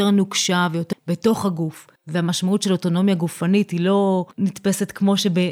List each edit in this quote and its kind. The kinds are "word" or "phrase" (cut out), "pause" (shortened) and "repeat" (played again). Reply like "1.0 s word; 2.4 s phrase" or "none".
0.9 s word; 2.0 s pause; 4.3 s pause